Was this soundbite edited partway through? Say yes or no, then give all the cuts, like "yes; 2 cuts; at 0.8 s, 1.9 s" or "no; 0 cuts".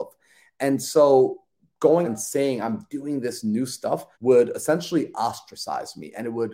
yes; 2 cuts; at 2.0 s, 4.1 s